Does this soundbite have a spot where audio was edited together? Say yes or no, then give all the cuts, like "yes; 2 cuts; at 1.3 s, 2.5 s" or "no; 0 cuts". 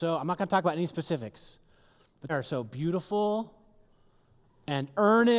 yes; 1 cut; at 2.3 s